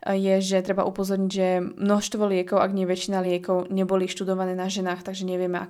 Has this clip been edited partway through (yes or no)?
no